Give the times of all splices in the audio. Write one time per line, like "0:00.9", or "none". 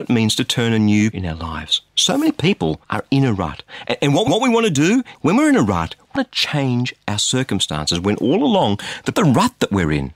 0:01.1
0:01.9
0:02.8
0:04.3
0:05.1
0:06.2
0:09.1